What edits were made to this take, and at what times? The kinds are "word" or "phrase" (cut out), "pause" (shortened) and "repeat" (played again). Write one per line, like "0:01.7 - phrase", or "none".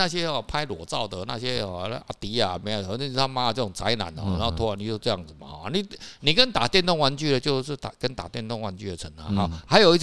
none